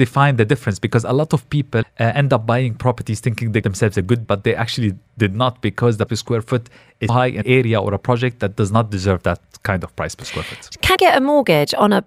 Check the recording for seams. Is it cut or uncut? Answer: cut